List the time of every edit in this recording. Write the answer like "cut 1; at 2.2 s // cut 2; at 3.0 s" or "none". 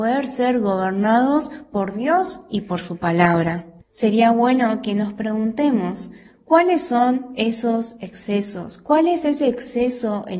cut 1; at 3.8 s